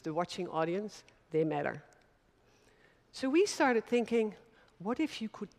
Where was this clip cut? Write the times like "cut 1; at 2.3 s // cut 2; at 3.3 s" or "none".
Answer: none